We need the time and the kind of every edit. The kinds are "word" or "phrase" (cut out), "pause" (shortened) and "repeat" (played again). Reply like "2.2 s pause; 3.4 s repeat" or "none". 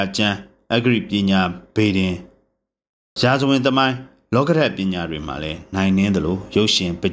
none